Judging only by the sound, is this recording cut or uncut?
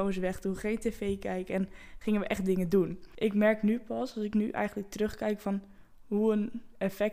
uncut